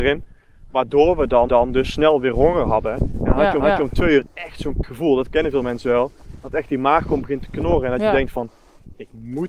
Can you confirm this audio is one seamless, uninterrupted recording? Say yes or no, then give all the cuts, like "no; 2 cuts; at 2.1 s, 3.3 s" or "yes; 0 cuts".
no; 3 cuts; at 1.5 s, 3.6 s, 4.8 s